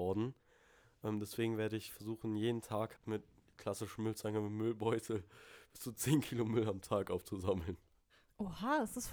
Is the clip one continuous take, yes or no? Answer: no